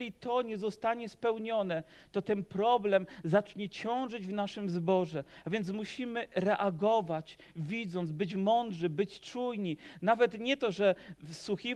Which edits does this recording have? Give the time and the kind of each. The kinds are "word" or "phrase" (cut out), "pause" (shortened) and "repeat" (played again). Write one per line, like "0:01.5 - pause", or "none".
none